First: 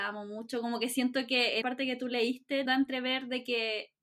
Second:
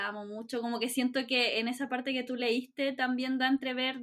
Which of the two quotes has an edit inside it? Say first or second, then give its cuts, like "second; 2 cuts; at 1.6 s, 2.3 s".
first; 2 cuts; at 1.6 s, 2.7 s